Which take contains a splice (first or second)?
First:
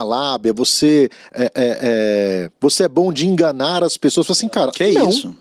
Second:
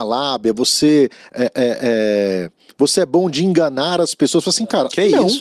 first